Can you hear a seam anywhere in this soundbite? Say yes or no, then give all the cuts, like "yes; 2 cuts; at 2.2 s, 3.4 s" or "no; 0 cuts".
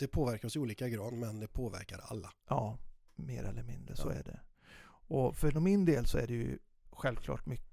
yes; 1 cut; at 5.5 s